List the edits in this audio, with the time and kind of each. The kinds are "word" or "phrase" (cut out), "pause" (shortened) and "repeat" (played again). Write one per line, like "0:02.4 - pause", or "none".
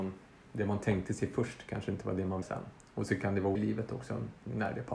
0:02.4 - word
0:03.6 - word